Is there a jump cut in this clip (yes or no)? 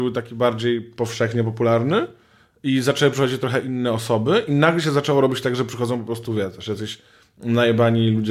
no